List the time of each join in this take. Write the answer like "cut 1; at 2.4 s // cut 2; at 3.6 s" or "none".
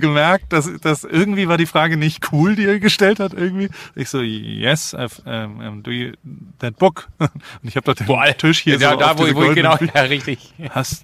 none